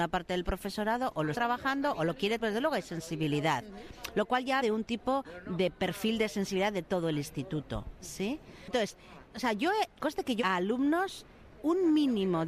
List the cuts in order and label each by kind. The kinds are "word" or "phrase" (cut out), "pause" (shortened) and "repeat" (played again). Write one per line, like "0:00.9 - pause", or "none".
0:01.3 - word
0:02.4 - word
0:04.6 - word
0:09.2 - word
0:10.0 - word
0:10.4 - word
0:11.6 - word